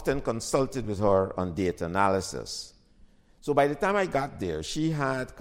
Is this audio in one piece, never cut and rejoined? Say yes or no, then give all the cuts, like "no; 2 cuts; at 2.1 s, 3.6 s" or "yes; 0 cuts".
yes; 0 cuts